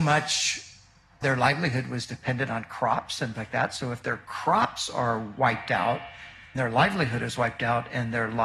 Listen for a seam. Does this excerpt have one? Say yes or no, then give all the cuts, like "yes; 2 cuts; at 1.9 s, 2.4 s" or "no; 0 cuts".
yes; 3 cuts; at 1.2 s, 3.4 s, 6.6 s